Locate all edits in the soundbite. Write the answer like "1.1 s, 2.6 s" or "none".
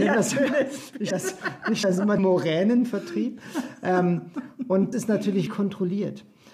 1.1 s, 1.8 s, 2.2 s, 4.9 s, 5.5 s